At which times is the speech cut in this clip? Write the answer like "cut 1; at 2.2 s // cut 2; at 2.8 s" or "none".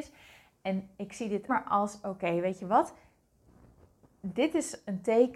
cut 1; at 1.5 s

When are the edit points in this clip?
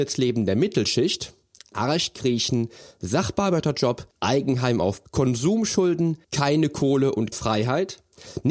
cut 1; at 4.1 s // cut 2; at 5.1 s // cut 3; at 6.2 s // cut 4; at 7.3 s

